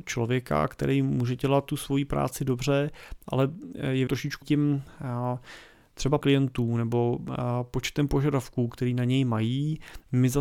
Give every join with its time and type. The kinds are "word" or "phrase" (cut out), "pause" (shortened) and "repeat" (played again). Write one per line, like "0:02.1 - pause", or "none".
0:04.1 - word
0:04.4 - word
0:06.2 - word